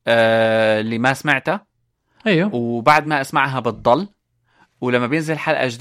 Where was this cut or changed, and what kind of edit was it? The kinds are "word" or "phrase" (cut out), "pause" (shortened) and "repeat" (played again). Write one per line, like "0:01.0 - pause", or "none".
none